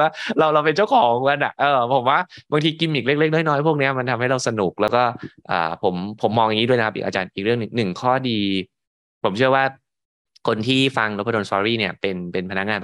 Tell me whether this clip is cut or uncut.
uncut